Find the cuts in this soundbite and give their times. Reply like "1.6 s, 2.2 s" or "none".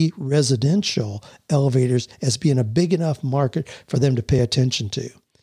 none